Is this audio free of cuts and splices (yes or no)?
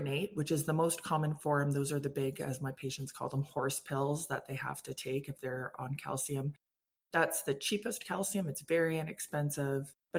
yes